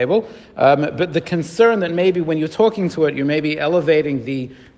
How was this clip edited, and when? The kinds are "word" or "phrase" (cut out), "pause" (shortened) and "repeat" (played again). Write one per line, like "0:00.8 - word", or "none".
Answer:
none